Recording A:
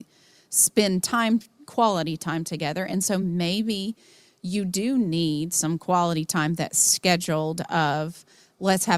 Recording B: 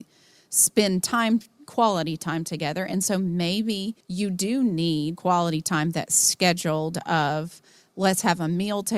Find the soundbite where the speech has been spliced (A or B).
B